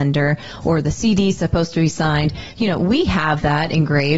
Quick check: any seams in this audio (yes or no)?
no